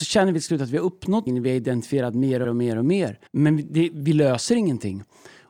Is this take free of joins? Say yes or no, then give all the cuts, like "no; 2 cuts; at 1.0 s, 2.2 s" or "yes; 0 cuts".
no; 3 cuts; at 1.3 s, 2.4 s, 3.3 s